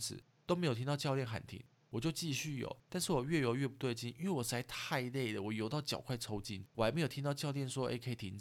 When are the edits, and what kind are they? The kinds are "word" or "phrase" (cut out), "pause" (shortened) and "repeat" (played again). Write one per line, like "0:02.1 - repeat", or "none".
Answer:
0:02.8 - pause
0:06.7 - pause